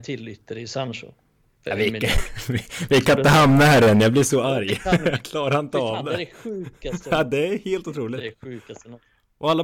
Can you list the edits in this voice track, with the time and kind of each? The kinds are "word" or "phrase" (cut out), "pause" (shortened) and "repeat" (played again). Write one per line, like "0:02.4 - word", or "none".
none